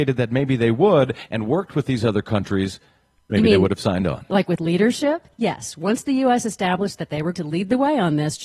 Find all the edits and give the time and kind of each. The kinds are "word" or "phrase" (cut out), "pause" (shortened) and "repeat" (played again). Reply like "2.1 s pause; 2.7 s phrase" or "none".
7.3 s word